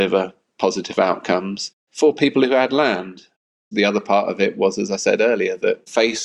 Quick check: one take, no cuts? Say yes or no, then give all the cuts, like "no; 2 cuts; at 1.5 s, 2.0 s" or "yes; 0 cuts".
yes; 0 cuts